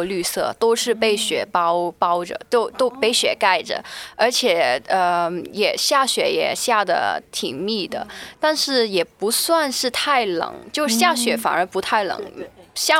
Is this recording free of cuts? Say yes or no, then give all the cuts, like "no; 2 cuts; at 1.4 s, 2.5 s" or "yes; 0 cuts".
yes; 0 cuts